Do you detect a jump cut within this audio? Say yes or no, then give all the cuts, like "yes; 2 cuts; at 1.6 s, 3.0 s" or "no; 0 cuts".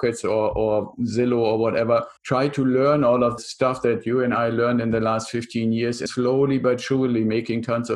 yes; 3 cuts; at 2.2 s, 3.4 s, 6.1 s